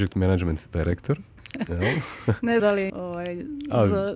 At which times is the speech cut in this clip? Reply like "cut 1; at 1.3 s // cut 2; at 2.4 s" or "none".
cut 1; at 2.6 s // cut 2; at 2.9 s